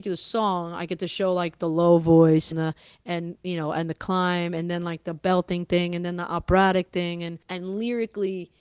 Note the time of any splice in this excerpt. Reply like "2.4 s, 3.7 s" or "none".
2.5 s, 7.4 s